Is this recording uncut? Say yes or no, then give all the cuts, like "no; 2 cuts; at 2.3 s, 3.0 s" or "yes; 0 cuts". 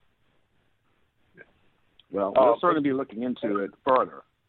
yes; 0 cuts